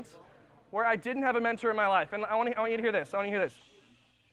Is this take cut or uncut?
uncut